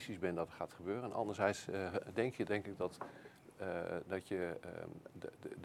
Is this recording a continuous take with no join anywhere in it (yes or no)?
no